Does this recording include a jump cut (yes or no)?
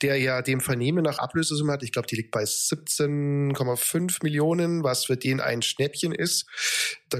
yes